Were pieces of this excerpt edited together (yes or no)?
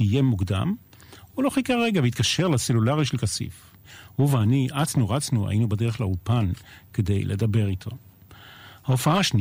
no